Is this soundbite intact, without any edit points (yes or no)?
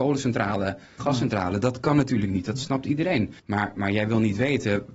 no